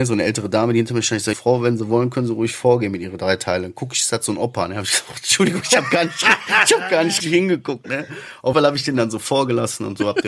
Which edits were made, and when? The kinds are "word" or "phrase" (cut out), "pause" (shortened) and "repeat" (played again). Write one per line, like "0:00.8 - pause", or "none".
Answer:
0:01.3 - word
0:07.2 - word
0:08.5 - word